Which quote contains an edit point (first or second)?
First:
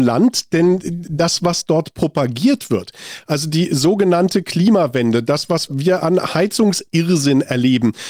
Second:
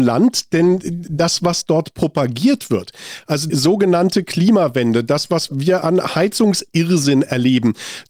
second